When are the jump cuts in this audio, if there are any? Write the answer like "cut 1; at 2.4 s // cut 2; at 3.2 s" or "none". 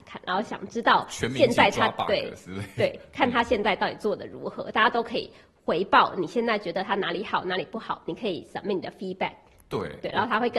none